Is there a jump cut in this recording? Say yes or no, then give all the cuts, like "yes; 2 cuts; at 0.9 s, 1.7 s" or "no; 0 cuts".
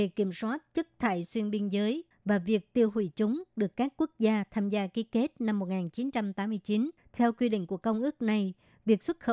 yes; 1 cut; at 7.0 s